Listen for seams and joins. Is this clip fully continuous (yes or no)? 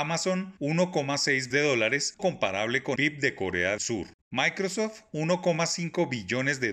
no